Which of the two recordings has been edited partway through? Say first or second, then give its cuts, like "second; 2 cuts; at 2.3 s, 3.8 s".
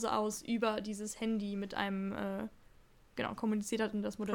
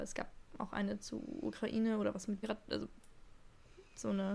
second; 1 cut; at 2.4 s